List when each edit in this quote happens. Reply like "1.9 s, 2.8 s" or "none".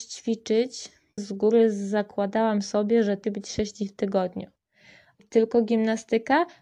1.2 s, 3.2 s, 5.2 s